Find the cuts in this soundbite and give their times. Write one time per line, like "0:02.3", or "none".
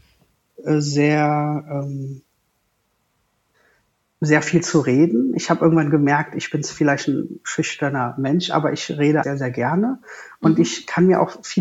0:09.2